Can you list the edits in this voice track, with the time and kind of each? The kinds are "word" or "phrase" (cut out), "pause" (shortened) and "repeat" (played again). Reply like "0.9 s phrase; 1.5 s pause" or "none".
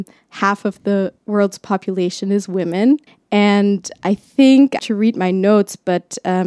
1.2 s pause; 3.1 s pause; 4.8 s word